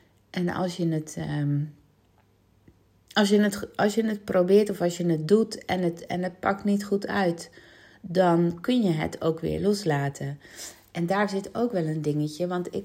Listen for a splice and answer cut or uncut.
uncut